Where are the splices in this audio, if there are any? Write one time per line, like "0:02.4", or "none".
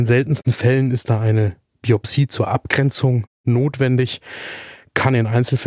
none